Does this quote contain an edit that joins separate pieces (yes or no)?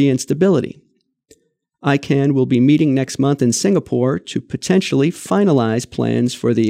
no